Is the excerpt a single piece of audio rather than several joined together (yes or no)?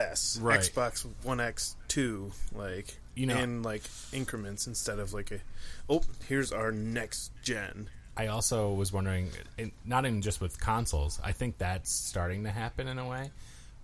yes